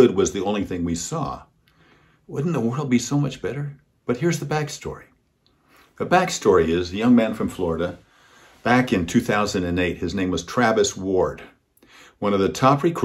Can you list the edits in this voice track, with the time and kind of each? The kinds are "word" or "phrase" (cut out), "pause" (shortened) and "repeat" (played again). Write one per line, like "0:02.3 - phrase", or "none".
none